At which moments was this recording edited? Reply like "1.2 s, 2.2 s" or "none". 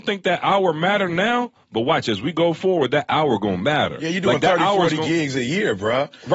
none